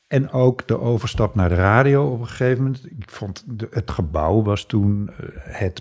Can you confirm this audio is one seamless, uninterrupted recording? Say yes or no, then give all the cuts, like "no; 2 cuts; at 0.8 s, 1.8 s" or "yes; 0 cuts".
yes; 0 cuts